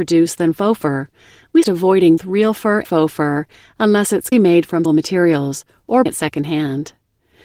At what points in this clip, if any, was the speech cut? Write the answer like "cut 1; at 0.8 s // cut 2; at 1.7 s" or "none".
cut 1; at 1.6 s // cut 2; at 2.2 s // cut 3; at 2.8 s // cut 4; at 4.3 s // cut 5; at 4.8 s // cut 6; at 6.1 s